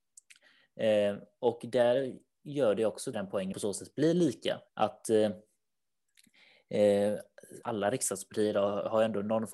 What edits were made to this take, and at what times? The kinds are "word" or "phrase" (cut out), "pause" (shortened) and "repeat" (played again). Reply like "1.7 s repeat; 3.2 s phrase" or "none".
3.1 s word; 3.5 s phrase; 4.7 s pause; 7.6 s word